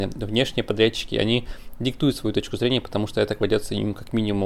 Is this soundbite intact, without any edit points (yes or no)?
yes